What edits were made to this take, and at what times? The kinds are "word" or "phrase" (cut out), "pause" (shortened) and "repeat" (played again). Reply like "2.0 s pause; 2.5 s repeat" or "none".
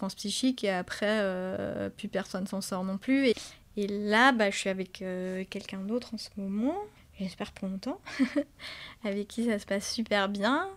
7.0 s pause